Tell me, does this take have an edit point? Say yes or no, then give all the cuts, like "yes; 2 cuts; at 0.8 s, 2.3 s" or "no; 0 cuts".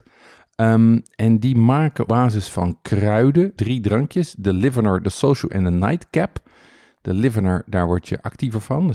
yes; 3 cuts; at 2.1 s, 3.6 s, 5.5 s